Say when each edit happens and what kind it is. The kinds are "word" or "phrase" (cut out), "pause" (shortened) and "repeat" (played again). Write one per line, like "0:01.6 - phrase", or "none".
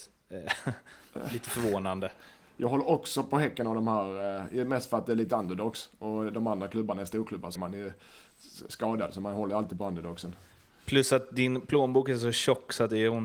0:07.6 - word